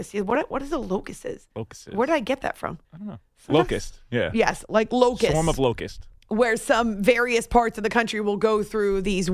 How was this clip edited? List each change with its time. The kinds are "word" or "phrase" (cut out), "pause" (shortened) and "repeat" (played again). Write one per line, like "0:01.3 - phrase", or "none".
0:02.8 - pause
0:06.2 - pause